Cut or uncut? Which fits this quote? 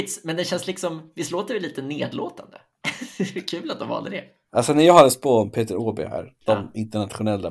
uncut